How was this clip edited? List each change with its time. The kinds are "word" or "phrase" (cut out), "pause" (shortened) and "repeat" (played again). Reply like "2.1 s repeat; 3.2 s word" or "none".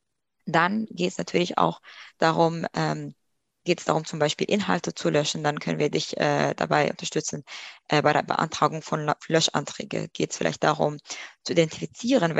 none